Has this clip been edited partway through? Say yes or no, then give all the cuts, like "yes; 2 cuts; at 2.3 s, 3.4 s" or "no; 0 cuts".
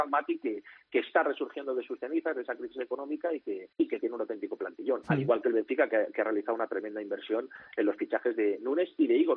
yes; 1 cut; at 3.7 s